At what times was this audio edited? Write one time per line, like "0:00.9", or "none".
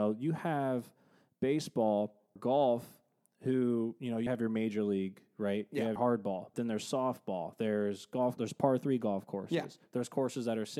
0:02.4
0:04.3
0:06.0
0:06.5
0:08.4

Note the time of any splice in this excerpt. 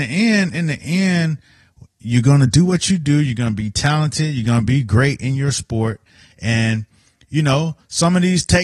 none

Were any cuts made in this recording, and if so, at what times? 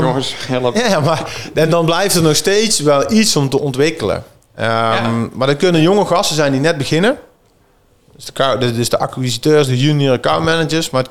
none

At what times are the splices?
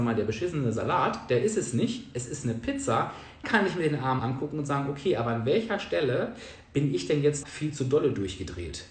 0:03.4
0:04.2
0:07.4

